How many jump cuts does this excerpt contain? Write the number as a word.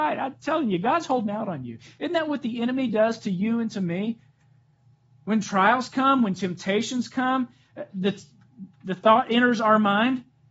zero